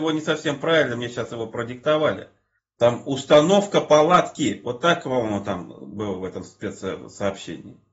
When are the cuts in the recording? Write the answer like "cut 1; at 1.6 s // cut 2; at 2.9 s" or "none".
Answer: cut 1; at 2.6 s